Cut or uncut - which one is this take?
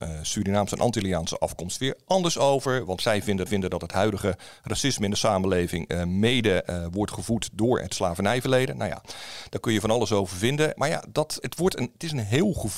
cut